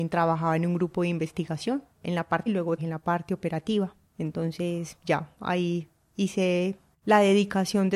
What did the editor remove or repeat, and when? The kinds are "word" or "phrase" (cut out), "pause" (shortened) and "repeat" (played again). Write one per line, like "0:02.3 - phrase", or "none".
0:01.9 - word
0:02.5 - word
0:02.8 - word